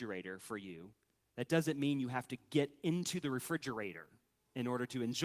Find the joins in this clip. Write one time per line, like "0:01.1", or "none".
none